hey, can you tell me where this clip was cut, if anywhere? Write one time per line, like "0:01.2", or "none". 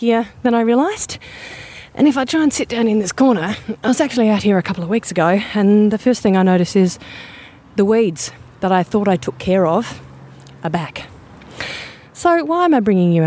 none